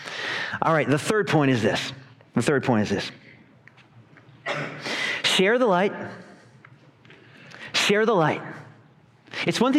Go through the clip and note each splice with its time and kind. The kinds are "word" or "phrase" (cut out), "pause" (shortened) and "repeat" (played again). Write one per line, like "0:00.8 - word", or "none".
none